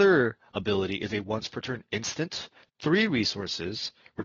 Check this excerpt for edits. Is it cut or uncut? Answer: uncut